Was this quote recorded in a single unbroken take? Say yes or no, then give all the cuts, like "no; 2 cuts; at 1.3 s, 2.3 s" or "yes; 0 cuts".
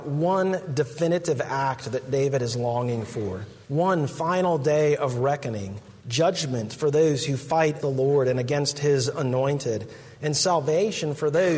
no; 3 cuts; at 3.6 s, 6.0 s, 7.8 s